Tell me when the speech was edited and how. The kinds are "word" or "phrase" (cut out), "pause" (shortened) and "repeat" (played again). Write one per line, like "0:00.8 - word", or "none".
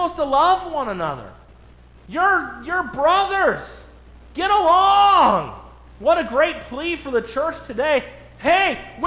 none